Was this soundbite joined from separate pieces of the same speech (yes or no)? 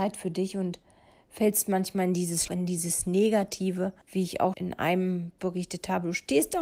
yes